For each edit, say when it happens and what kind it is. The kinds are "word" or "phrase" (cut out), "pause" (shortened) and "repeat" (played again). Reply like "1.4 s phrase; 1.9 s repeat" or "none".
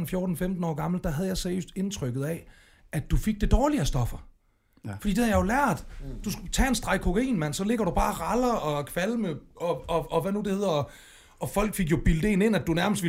none

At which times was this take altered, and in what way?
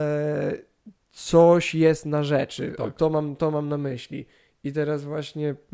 1.0 s pause

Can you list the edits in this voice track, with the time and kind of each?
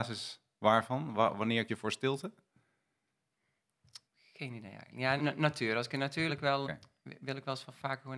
1.7 s word; 4.1 s pause; 5.2 s word; 6.3 s phrase; 6.6 s word

